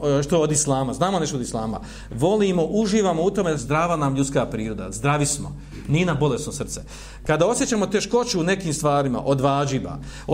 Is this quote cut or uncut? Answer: cut